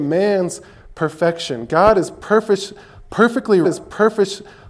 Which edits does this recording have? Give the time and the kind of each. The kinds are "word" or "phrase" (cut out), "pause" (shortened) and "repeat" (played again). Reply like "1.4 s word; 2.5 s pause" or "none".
3.6 s repeat